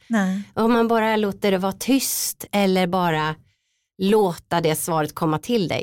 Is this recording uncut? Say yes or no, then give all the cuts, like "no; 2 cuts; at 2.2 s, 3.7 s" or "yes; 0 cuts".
yes; 0 cuts